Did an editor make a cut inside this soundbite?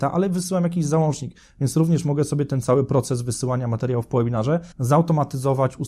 yes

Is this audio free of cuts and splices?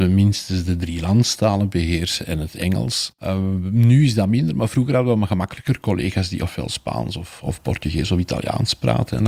yes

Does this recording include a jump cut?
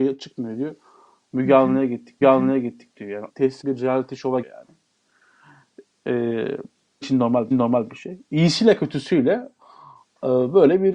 yes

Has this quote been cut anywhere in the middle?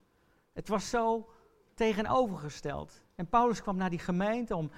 yes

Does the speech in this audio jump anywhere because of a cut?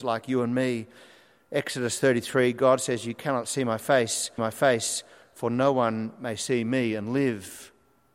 yes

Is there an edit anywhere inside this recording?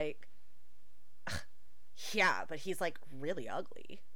no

